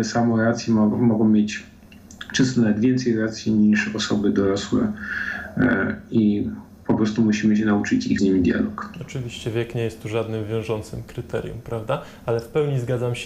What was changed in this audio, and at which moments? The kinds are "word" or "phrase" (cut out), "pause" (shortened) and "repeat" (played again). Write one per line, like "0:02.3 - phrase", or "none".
0:08.2 - phrase